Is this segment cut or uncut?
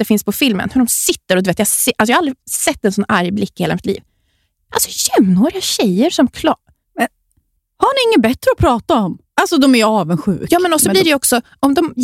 uncut